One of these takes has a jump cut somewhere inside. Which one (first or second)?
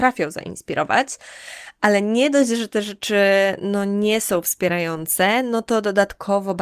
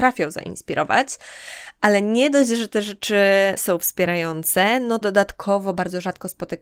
second